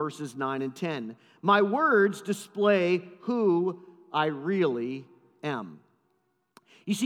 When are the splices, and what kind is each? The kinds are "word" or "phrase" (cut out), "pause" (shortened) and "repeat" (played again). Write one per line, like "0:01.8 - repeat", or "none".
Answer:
none